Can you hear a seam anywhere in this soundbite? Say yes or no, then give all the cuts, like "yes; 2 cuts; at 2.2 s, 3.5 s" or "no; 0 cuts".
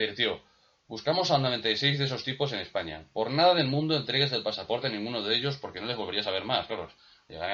no; 0 cuts